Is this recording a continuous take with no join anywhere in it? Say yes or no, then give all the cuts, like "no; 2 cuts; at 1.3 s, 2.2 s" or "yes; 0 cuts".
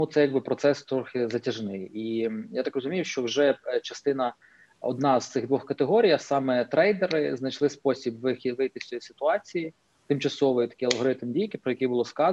yes; 0 cuts